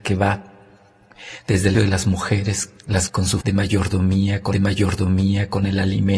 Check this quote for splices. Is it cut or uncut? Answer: cut